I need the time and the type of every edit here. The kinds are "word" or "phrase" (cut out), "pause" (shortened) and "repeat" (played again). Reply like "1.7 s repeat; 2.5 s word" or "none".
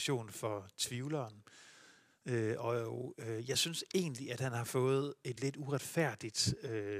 none